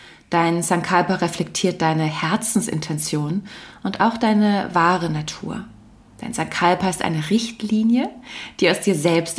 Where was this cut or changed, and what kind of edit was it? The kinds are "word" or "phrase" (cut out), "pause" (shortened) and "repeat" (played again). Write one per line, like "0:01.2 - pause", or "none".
none